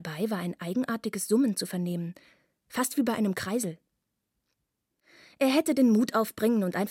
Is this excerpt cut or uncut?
uncut